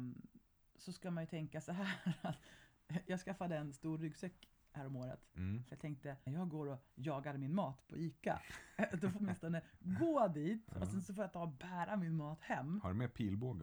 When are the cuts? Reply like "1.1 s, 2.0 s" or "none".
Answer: 6.3 s, 6.9 s, 9.2 s